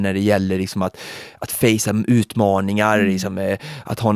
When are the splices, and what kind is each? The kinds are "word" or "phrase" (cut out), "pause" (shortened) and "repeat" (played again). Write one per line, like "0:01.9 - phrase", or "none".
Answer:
none

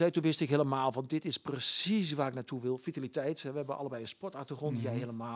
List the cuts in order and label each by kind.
none

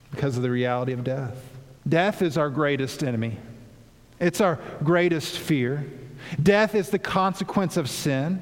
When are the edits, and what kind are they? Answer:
0:01.8 - pause

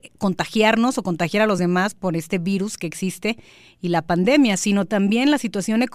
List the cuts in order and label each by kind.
none

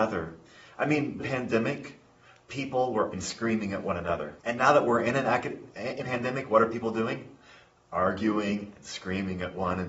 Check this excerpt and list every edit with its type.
0:01.2 - phrase
0:03.1 - word
0:04.4 - pause
0:06.0 - word

